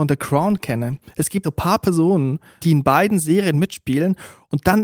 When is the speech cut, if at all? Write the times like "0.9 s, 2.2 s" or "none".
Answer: 1.4 s, 2.6 s

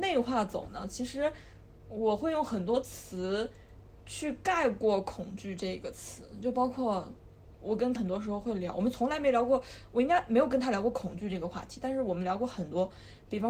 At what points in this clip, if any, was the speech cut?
8.0 s

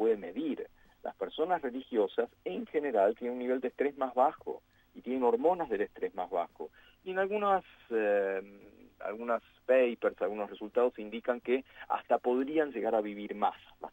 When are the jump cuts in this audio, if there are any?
none

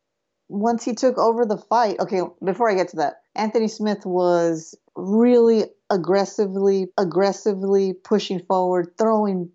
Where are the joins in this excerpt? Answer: 3.2 s, 4.8 s, 6.9 s

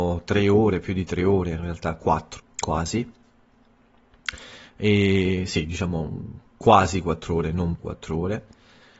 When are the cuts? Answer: 2.4 s, 7.8 s

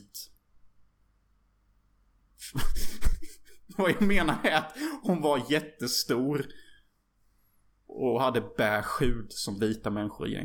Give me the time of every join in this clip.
none

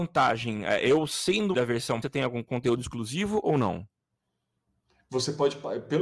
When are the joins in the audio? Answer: 1.5 s, 2.0 s

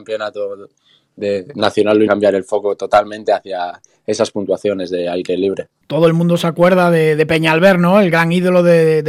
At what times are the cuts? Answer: 2.1 s

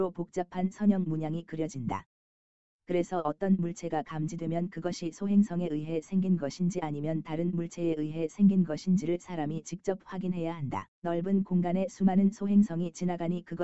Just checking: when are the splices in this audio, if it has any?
10.9 s

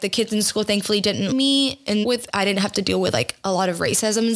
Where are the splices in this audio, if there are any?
1.3 s, 2.0 s

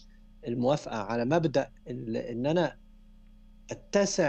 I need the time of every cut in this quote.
1.8 s

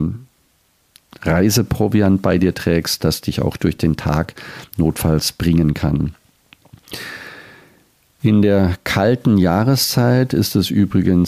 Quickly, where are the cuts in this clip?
none

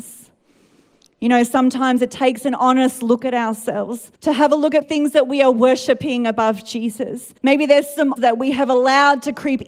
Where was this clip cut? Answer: 4.2 s, 4.8 s, 7.4 s, 8.2 s

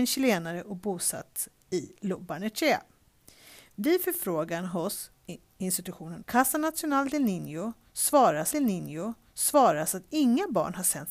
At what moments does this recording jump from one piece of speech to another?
6.2 s, 8.5 s

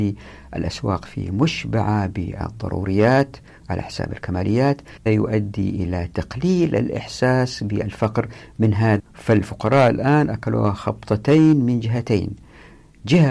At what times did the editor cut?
5.1 s, 9.0 s

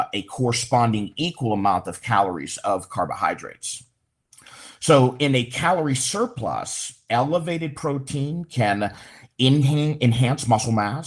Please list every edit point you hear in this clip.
none

